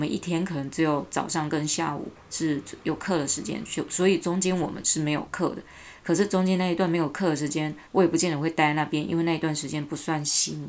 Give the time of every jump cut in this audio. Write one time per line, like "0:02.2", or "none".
0:07.9